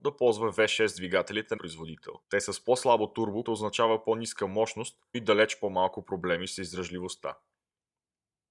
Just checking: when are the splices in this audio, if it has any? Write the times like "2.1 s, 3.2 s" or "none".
1.6 s, 2.2 s, 3.4 s, 5.1 s